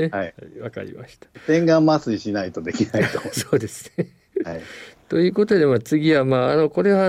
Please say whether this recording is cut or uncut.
uncut